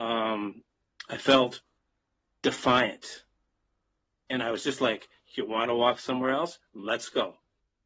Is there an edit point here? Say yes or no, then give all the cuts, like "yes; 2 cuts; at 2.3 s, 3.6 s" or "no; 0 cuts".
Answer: no; 0 cuts